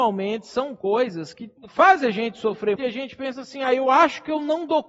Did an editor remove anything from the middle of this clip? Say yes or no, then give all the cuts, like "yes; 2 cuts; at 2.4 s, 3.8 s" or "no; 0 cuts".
yes; 2 cuts; at 1.6 s, 2.8 s